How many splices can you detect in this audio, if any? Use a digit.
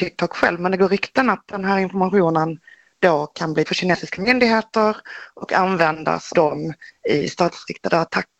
2